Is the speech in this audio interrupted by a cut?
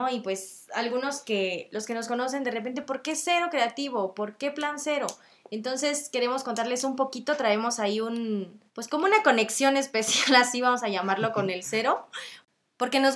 yes; 1 cut; at 8.7 s

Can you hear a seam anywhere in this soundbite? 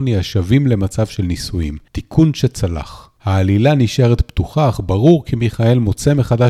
yes; 2 cuts; at 1.9 s, 3.2 s

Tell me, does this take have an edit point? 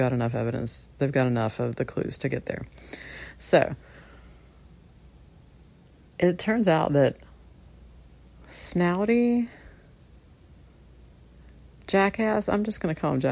no; 0 cuts

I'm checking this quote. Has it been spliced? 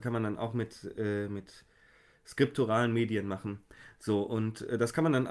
no; 0 cuts

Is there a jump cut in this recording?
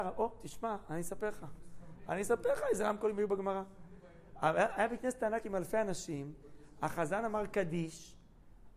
no; 0 cuts

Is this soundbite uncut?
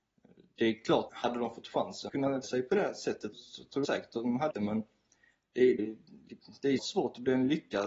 no; 8 cuts; at 1.1 s, 2.1 s, 2.4 s, 3.3 s, 3.8 s, 4.5 s, 5.8 s, 6.8 s

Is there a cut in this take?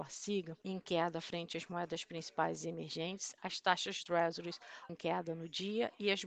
yes; 2 cuts; at 4.1 s, 4.9 s

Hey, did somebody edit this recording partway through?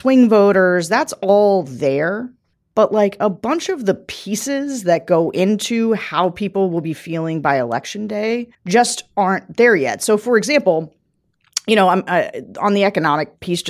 yes; 2 cuts; at 2.5 s, 8.5 s

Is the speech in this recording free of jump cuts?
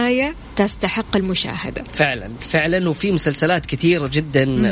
yes; 0 cuts

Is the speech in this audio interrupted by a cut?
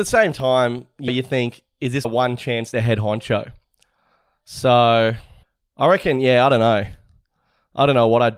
yes; 4 cuts; at 1.1 s, 2.0 s, 2.7 s, 5.4 s

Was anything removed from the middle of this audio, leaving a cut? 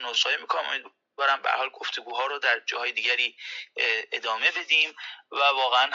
no; 0 cuts

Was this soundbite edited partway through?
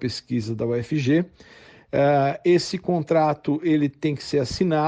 no; 0 cuts

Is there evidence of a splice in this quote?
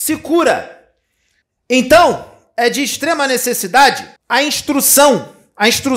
yes; 2 cuts; at 1.4 s, 4.2 s

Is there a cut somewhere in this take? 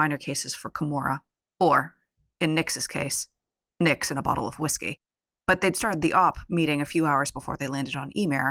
no; 0 cuts

